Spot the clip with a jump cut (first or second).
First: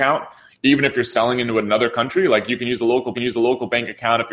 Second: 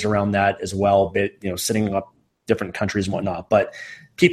first